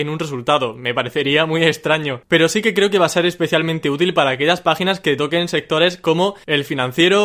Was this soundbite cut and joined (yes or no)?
no